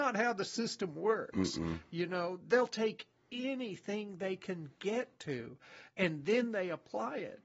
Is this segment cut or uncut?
uncut